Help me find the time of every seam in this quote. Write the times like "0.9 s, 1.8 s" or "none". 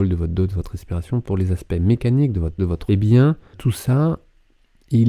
1.3 s, 2.6 s, 2.9 s, 3.5 s